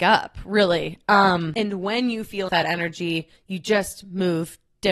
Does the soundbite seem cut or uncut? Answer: cut